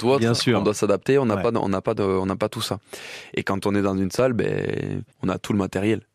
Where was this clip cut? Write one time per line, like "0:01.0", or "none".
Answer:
0:05.1